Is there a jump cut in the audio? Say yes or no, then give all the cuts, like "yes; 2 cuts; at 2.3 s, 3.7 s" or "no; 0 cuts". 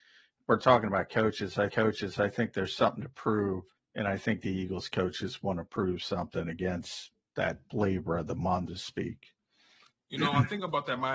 yes; 3 cuts; at 1.7 s, 3.7 s, 8.7 s